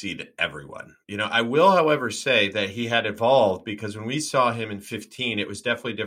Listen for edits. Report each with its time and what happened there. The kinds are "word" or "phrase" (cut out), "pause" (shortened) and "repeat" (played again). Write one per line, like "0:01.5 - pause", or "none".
0:01.0 - pause